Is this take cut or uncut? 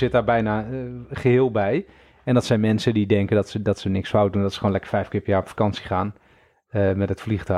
uncut